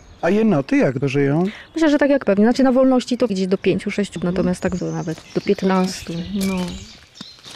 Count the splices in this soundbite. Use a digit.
6